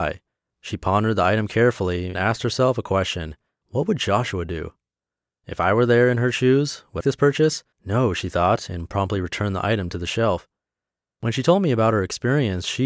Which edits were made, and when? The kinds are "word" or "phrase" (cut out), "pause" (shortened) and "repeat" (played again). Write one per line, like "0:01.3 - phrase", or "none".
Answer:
0:02.1 - word
0:07.0 - phrase
0:07.7 - pause